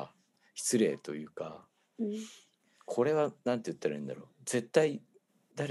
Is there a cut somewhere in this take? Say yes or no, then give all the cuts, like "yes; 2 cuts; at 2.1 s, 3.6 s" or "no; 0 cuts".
no; 0 cuts